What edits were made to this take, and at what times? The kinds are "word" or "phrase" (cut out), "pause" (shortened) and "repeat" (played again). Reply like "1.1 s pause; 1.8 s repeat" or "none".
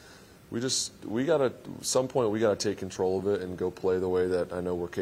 none